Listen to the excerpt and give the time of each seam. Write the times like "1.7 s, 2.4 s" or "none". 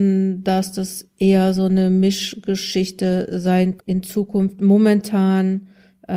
3.8 s